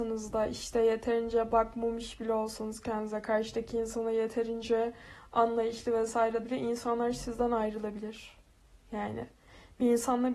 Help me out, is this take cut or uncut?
cut